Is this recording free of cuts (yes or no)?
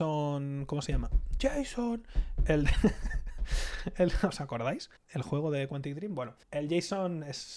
no